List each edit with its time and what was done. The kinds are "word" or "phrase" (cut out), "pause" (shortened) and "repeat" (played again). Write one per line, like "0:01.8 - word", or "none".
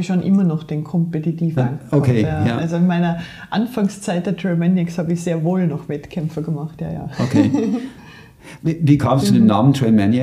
0:01.6 - word
0:09.2 - word